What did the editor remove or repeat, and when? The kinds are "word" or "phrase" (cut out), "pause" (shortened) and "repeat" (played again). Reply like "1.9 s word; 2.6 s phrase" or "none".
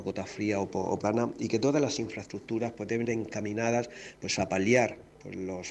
1.0 s word; 3.0 s word

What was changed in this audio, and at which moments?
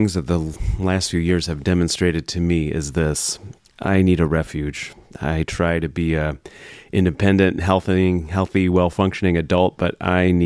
none

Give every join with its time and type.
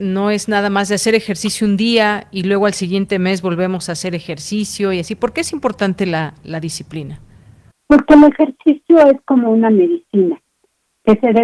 7.7 s pause

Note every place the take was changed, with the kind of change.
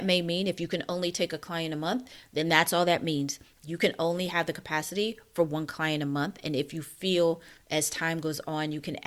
none

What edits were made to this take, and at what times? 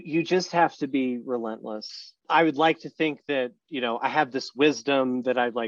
2.2 s pause

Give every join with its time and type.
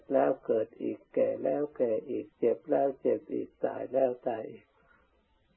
2.3 s pause

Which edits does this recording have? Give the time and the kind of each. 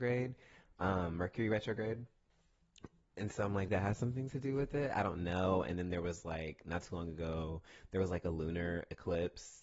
3.7 s word

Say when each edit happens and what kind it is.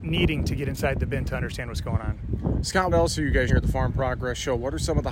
2.9 s word; 3.5 s word

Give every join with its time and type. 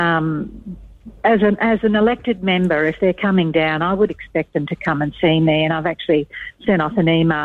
none

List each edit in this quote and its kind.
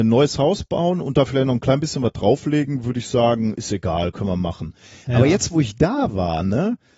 none

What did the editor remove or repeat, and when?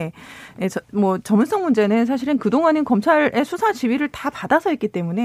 none

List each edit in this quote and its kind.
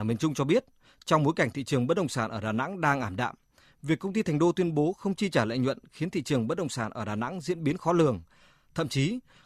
none

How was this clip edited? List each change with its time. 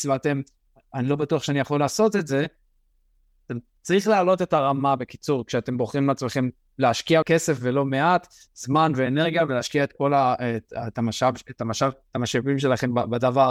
7.2 s word

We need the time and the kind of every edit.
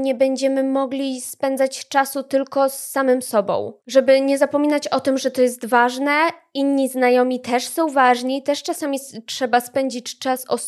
3.8 s pause

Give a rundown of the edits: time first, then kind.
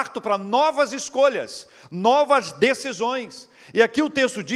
none

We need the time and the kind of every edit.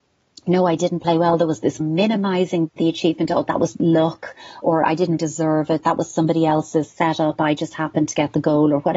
1.8 s phrase; 3.7 s word; 5.2 s word

